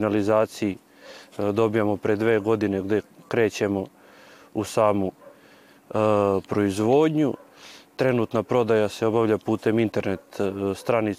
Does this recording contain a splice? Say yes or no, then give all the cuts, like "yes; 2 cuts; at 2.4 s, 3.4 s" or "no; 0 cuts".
no; 0 cuts